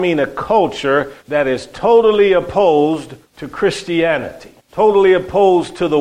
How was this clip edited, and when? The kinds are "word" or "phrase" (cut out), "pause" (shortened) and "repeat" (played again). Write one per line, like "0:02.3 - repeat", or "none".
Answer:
0:01.2 - pause
0:03.2 - pause
0:04.6 - pause